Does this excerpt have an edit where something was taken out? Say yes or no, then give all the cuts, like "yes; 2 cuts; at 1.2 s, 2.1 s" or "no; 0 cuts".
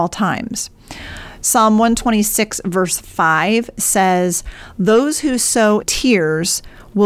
yes; 1 cut; at 5.8 s